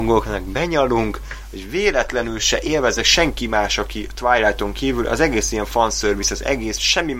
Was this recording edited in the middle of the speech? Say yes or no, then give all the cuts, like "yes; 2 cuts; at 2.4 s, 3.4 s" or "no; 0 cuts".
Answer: no; 0 cuts